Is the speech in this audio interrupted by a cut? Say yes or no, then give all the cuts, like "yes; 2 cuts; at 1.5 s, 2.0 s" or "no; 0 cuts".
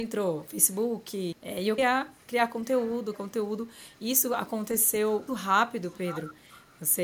yes; 4 cuts; at 1.3 s, 1.8 s, 3.1 s, 5.3 s